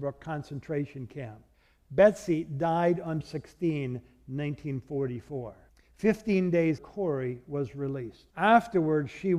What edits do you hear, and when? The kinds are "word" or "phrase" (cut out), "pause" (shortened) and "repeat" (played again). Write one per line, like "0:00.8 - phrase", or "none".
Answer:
0:01.5 - pause
0:03.2 - word
0:05.7 - pause
0:06.8 - word
0:08.3 - pause